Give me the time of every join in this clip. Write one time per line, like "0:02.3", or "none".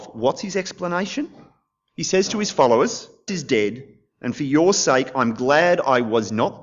0:03.3